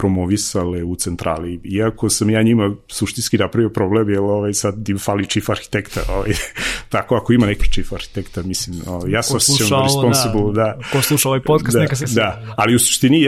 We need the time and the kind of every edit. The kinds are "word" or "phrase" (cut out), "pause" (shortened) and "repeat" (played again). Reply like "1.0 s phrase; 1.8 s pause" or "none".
7.6 s word; 12.0 s word